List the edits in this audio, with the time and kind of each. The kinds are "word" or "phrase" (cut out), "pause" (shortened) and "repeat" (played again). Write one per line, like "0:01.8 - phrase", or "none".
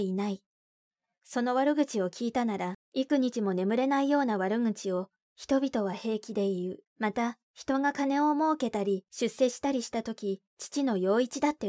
0:06.9 - pause
0:10.5 - pause